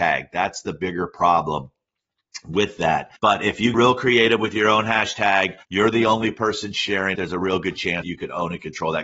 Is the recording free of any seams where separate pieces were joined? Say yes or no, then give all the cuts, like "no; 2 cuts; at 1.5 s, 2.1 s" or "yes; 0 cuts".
no; 5 cuts; at 3.2 s, 3.7 s, 5.6 s, 7.1 s, 8.0 s